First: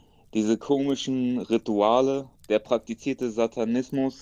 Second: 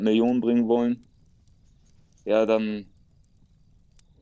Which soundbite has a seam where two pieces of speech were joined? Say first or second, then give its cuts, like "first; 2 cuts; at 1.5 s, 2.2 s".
first; 1 cut; at 2.4 s